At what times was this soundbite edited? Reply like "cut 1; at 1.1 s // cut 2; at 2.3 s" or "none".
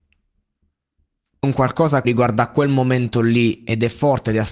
cut 1; at 1.4 s // cut 2; at 2.0 s